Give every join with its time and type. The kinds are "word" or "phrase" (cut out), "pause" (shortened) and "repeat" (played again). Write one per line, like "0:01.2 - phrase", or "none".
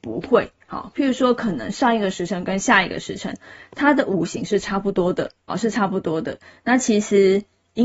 0:05.5 - word